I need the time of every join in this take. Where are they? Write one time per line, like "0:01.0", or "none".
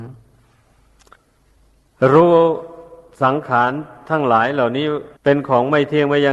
0:05.2